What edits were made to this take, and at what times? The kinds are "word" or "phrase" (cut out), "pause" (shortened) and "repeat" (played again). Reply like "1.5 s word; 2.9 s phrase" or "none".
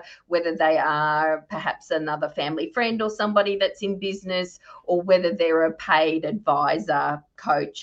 none